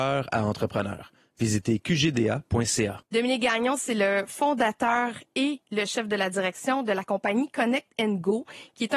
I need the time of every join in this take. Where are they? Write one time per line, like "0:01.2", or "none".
0:03.0